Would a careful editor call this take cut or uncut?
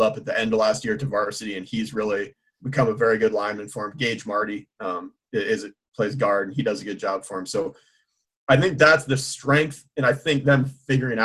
cut